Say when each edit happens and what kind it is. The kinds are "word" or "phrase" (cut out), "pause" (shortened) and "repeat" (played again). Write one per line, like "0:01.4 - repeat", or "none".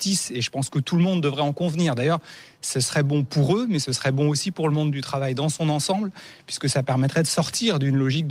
none